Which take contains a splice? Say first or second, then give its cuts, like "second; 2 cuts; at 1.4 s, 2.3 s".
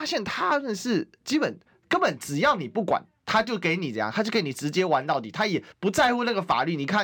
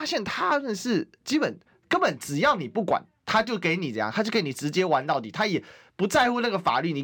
first; 1 cut; at 5.7 s